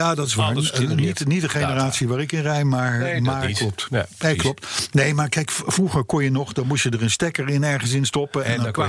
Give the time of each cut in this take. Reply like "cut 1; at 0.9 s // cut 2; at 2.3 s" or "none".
none